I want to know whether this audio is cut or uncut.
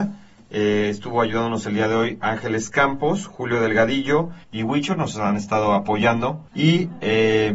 cut